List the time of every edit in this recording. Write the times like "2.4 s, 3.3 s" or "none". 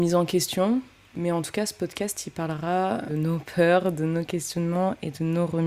3.1 s